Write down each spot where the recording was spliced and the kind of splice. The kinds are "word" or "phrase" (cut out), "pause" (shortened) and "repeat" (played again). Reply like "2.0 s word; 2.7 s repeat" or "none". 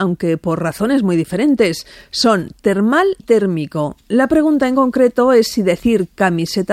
3.2 s word